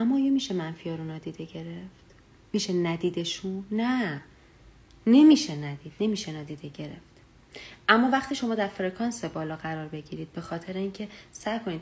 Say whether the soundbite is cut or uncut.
uncut